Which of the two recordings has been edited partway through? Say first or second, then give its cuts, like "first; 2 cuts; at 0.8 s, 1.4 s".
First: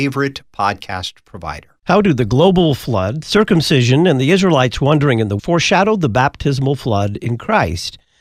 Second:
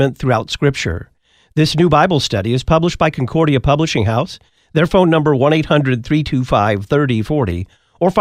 first; 2 cuts; at 1.8 s, 5.4 s